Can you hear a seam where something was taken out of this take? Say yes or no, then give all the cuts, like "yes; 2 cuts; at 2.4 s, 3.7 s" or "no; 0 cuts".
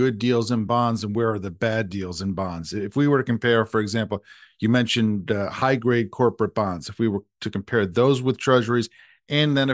no; 0 cuts